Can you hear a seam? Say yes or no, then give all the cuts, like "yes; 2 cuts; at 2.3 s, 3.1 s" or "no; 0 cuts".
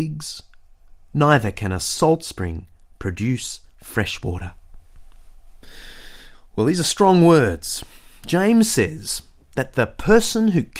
no; 0 cuts